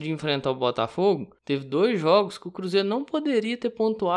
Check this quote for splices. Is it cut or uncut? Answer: cut